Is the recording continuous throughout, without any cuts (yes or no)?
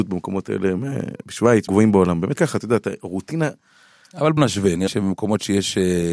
no